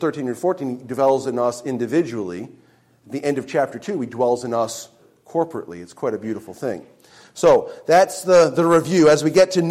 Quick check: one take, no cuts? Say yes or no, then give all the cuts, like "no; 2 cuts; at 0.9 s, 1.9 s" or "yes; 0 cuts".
yes; 0 cuts